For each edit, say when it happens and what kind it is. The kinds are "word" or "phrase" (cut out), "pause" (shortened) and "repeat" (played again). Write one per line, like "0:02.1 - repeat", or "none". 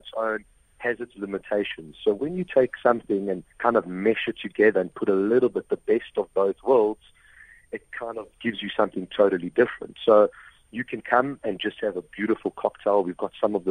0:03.5 - pause
0:08.3 - word

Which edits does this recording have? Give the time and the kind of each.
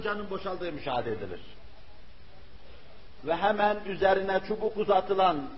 none

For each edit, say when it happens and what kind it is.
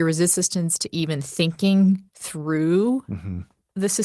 0:02.1 - pause

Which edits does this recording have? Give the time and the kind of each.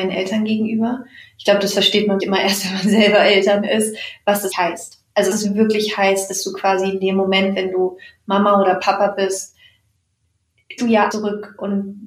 0:02.2 - word
0:04.5 - word
0:05.3 - word
0:10.8 - word
0:11.1 - word

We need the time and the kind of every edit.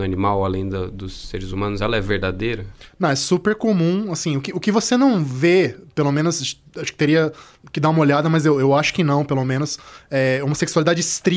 none

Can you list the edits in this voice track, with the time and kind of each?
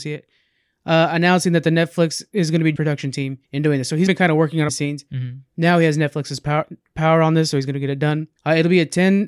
0:02.8 - phrase
0:03.4 - pause
0:04.1 - word
0:04.7 - phrase
0:08.4 - pause

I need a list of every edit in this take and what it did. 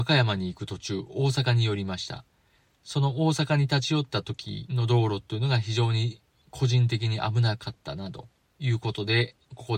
none

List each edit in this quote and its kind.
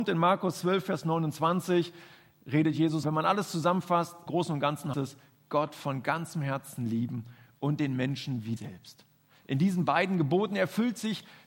0:03.0 - word
0:04.3 - word
0:04.9 - word
0:08.6 - word

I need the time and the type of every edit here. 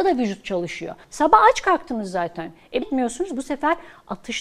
0:01.0 - pause
0:02.8 - phrase

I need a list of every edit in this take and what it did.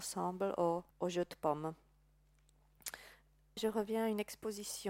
0:00.9 - pause
0:03.6 - word

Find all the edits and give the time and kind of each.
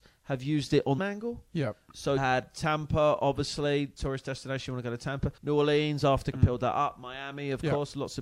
0:01.0 - phrase
0:02.2 - word
0:04.0 - word
0:05.4 - pause
0:06.3 - phrase

